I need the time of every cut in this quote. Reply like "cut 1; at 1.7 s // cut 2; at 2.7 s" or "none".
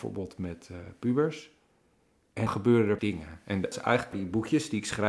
cut 1; at 2.5 s // cut 2; at 3.0 s // cut 3; at 3.7 s // cut 4; at 4.1 s